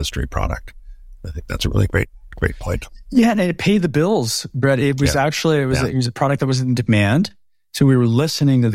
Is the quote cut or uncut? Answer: uncut